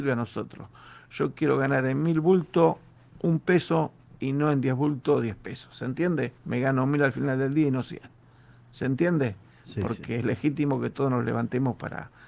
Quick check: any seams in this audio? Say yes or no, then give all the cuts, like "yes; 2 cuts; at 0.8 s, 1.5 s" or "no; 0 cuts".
yes; 1 cut; at 6.4 s